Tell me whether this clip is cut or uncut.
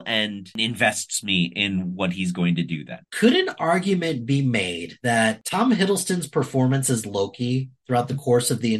uncut